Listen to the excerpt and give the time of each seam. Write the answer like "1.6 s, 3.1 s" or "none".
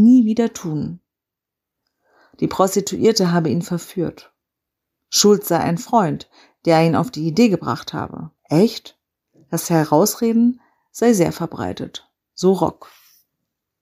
8.4 s